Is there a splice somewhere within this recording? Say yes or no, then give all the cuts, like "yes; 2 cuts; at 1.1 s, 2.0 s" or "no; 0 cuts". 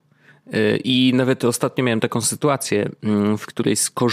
no; 0 cuts